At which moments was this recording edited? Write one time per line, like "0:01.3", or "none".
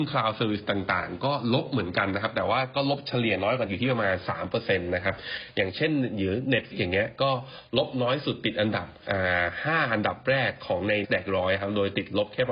0:03.7
0:06.7
0:11.0